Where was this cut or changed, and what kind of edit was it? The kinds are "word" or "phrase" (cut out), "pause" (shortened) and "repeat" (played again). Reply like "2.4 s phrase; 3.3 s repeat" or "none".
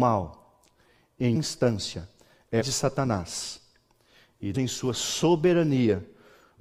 1.3 s word; 2.6 s word; 4.5 s word